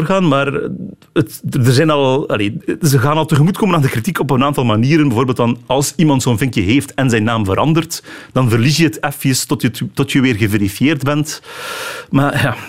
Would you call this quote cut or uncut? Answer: uncut